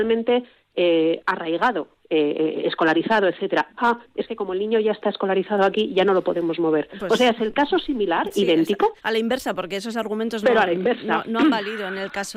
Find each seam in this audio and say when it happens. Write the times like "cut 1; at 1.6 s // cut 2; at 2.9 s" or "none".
cut 1; at 9.0 s